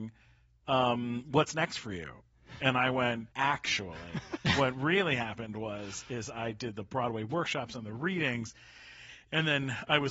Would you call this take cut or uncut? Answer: cut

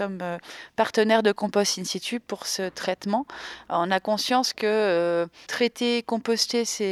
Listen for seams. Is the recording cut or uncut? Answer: cut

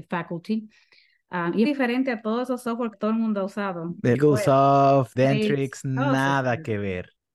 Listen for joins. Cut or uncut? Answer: cut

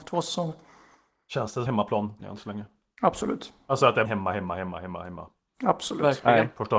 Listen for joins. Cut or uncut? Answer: cut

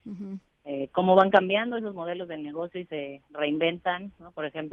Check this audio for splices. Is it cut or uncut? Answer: uncut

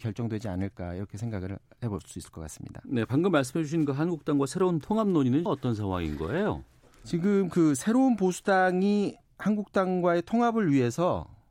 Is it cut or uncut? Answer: cut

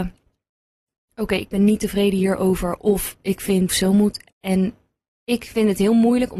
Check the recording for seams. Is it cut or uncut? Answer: cut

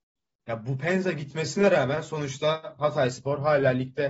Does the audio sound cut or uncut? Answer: uncut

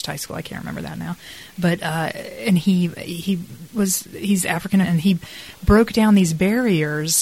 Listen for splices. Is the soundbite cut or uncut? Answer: cut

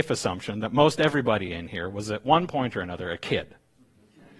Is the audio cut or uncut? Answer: uncut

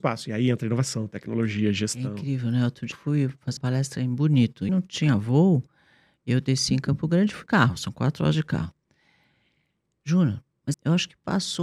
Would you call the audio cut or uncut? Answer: cut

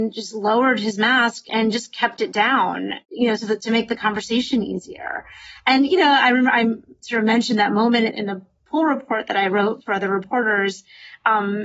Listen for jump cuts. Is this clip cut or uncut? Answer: cut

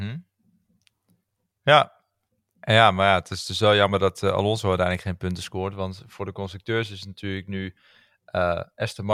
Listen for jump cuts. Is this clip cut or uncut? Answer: uncut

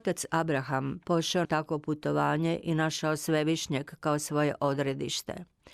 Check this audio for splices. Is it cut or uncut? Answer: cut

